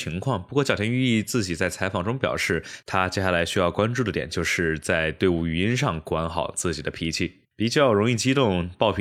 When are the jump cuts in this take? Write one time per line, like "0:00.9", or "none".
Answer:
0:07.4